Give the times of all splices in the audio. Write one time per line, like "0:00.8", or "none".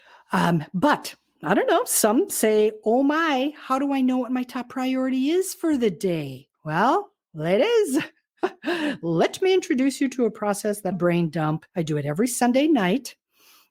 0:06.5
0:10.9
0:11.7